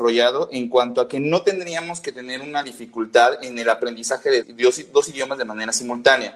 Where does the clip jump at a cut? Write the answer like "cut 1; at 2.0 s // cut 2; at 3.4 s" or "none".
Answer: cut 1; at 4.4 s